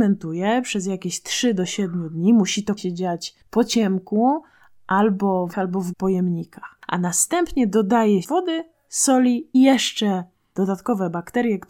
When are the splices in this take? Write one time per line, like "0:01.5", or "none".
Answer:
0:02.8
0:03.4
0:05.5
0:05.9
0:08.2
0:09.5